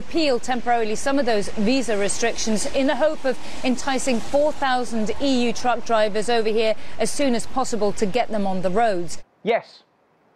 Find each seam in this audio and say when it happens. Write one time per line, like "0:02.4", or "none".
0:09.3